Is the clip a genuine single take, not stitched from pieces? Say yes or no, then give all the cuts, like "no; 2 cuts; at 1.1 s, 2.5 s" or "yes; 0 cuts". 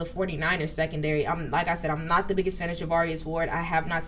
yes; 0 cuts